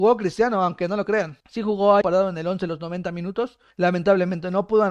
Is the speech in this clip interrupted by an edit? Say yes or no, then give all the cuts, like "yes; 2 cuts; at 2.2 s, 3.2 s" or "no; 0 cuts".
yes; 3 cuts; at 1.4 s, 2.0 s, 3.7 s